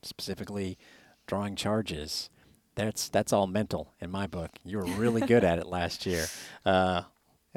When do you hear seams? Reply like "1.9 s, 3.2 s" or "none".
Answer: none